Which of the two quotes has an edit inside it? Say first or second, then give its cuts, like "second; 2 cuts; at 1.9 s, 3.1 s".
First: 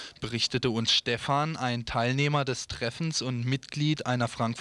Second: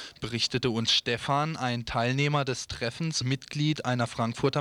second; 1 cut; at 3.2 s